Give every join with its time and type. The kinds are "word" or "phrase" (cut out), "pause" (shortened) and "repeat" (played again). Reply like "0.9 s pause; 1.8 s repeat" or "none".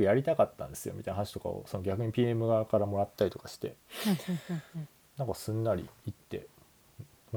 none

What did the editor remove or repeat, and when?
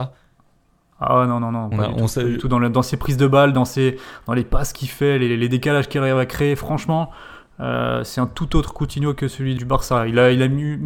9.6 s word

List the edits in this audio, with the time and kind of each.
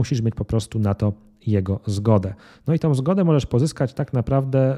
none

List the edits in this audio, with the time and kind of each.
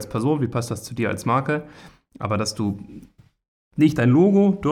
none

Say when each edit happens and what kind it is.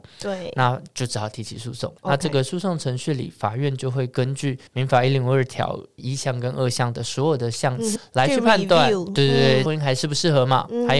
2.0 s pause; 4.7 s pause; 6.0 s word; 8.0 s word; 9.7 s phrase

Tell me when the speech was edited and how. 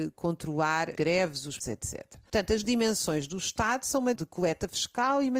0.9 s word; 1.6 s word; 2.6 s word; 4.1 s word

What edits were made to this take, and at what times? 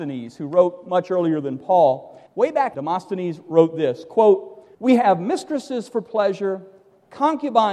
2.3 s pause; 2.7 s word; 4.7 s pause

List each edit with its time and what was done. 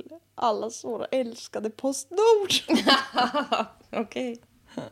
none

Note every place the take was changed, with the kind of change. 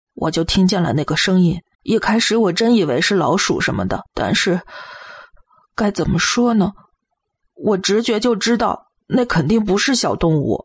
1.7 s pause; 4.1 s pause

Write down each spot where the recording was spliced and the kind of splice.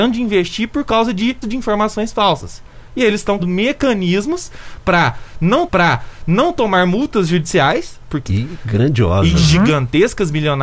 1.4 s word; 3.4 s word; 5.7 s repeat; 8.3 s phrase

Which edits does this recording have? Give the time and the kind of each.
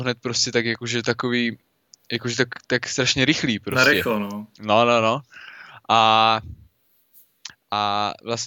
none

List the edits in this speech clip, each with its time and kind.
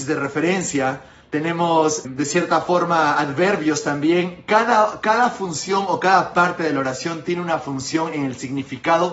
2.0 s word

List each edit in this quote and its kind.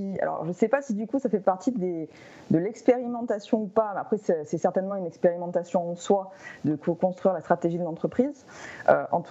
none

